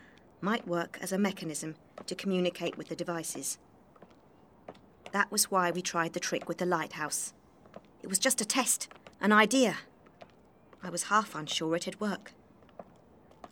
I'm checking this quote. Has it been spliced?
yes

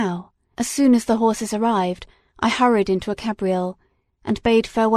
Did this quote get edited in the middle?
no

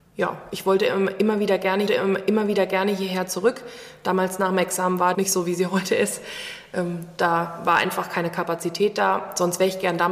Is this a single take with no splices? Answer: no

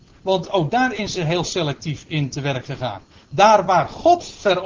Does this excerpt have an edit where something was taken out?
no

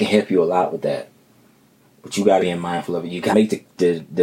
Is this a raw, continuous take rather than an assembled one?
no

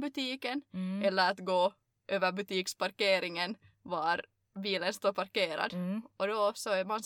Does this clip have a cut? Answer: no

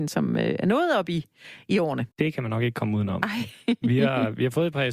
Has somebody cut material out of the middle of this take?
yes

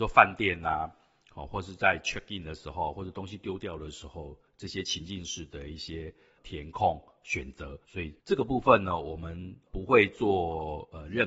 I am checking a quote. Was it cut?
yes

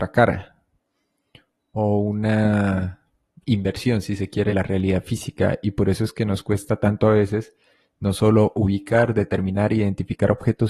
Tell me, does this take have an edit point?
yes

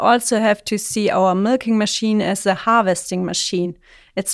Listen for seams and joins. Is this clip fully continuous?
yes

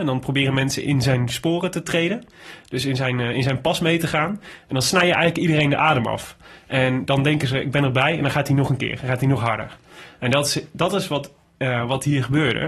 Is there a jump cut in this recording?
no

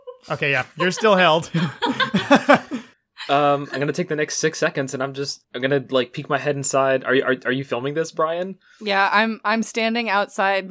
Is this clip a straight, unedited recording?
no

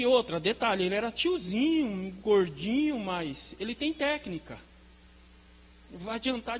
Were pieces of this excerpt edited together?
no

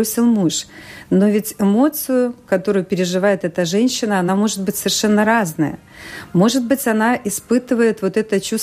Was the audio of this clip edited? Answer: no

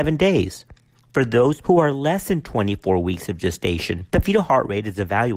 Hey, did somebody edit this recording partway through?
yes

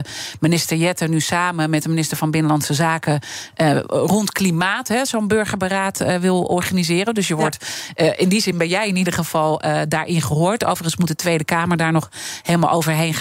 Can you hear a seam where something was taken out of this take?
no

